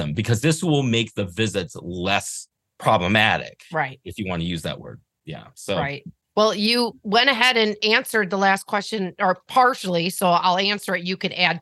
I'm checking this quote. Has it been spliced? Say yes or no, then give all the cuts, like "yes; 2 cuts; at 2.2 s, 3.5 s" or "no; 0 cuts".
no; 0 cuts